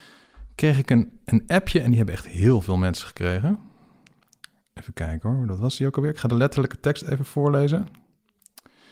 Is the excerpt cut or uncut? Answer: uncut